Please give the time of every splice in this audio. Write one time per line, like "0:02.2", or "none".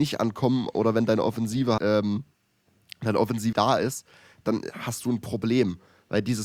0:01.8
0:03.5